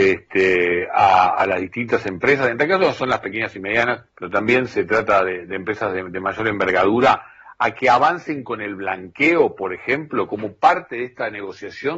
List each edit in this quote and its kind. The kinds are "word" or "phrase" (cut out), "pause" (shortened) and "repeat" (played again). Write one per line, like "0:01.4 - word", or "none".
0:04.1 - pause